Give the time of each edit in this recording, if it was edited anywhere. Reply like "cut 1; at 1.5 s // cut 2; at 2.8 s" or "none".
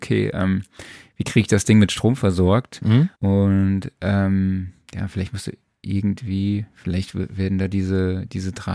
cut 1; at 3.1 s